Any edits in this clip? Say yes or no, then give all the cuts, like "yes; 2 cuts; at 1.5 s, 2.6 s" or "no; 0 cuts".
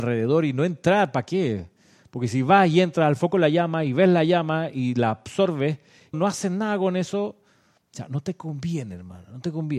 yes; 1 cut; at 6.1 s